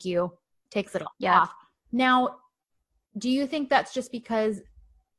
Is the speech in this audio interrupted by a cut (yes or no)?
no